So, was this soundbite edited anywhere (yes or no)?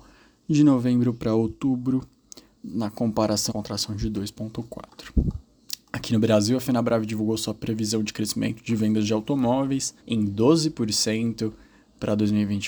yes